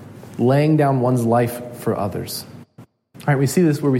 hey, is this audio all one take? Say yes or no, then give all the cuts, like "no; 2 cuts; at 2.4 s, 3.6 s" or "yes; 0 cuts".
yes; 0 cuts